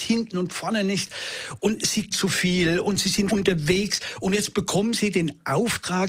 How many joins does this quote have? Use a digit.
2